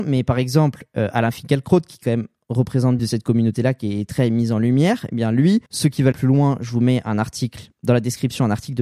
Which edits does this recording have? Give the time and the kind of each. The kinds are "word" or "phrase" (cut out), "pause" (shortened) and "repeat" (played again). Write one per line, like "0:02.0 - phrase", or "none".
0:03.0 - phrase
0:05.7 - pause
0:06.1 - word